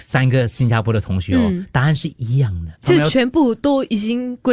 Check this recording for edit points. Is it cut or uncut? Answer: cut